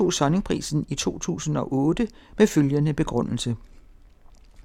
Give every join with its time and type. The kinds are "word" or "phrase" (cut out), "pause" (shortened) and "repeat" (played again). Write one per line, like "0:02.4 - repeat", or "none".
none